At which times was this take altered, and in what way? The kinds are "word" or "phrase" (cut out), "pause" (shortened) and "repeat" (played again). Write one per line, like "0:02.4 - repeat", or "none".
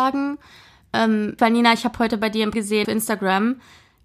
0:01.4 - word
0:02.5 - word
0:02.8 - word